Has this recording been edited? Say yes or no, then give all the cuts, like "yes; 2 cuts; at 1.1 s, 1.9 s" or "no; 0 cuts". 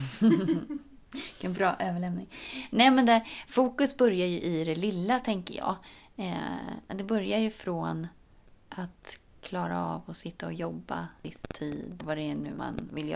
yes; 1 cut; at 12.0 s